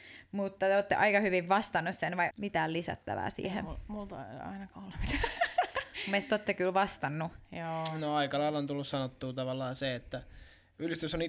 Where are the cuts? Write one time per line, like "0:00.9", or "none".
0:02.3